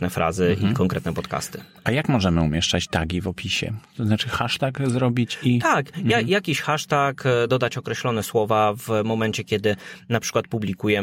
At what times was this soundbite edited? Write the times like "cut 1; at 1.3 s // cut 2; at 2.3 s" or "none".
none